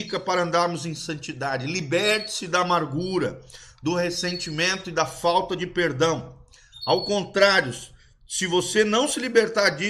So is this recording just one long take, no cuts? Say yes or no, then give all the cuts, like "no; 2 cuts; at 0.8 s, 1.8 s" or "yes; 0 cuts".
yes; 0 cuts